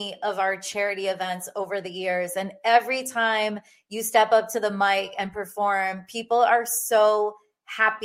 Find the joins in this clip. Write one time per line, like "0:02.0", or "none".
none